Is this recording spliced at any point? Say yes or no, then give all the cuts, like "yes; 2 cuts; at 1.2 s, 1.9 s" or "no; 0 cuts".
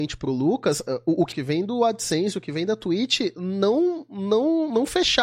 yes; 1 cut; at 1.3 s